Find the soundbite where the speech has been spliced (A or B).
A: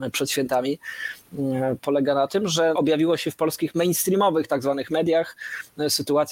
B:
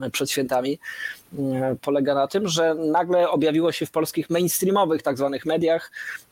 A